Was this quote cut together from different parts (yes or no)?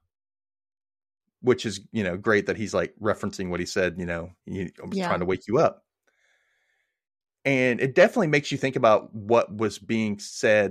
yes